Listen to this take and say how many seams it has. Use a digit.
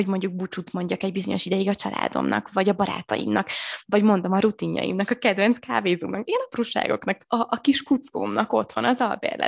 0